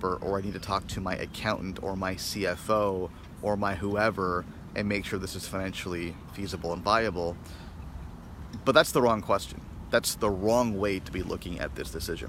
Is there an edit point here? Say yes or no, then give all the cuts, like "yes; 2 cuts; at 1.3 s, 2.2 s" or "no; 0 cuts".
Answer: no; 0 cuts